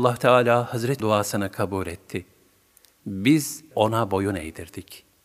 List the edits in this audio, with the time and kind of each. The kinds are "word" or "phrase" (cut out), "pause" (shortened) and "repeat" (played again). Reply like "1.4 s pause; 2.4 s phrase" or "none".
1.0 s word; 3.7 s word